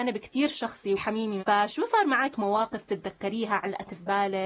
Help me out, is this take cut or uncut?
cut